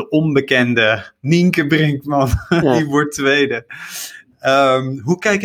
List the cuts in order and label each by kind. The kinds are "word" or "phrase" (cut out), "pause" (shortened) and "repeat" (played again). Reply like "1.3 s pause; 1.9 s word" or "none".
none